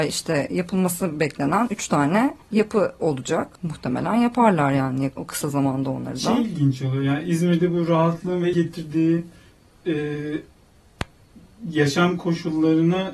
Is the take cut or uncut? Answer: cut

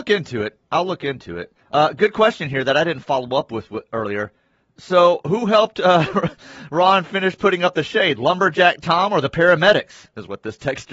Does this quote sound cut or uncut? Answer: cut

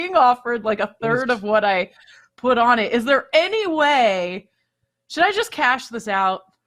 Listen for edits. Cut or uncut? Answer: uncut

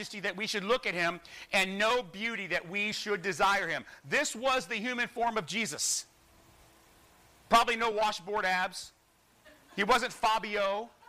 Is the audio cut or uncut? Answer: uncut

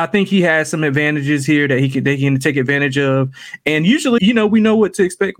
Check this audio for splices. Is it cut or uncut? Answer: cut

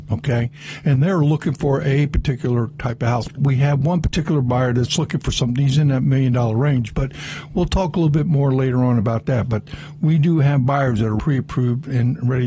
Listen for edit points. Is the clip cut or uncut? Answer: uncut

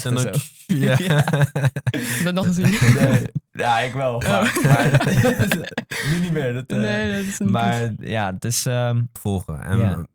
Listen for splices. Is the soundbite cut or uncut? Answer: cut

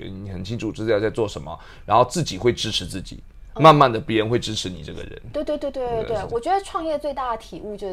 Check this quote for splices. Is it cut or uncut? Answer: cut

